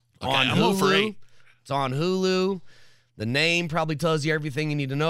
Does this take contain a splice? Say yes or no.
no